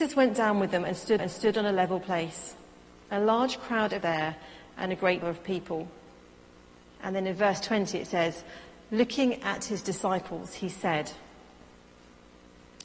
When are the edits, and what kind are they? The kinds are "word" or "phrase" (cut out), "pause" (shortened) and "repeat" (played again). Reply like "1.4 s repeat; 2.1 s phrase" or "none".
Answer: 1.2 s repeat; 4.0 s phrase; 5.2 s word